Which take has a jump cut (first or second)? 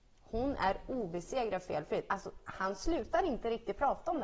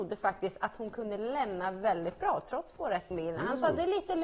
second